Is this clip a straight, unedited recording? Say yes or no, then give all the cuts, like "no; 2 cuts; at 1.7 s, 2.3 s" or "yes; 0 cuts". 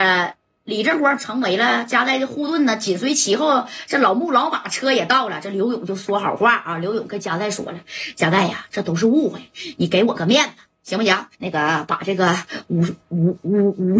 no; 2 cuts; at 1.2 s, 11.3 s